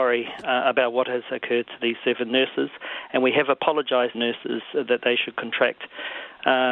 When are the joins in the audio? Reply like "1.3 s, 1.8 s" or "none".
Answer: 4.1 s